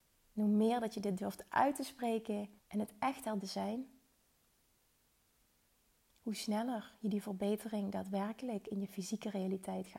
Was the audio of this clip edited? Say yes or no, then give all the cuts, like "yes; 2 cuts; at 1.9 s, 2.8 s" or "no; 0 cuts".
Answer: yes; 2 cuts; at 2.6 s, 3.4 s